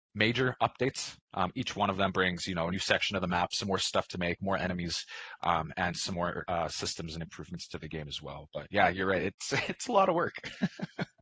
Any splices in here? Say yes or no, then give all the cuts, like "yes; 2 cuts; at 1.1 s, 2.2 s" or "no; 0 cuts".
no; 0 cuts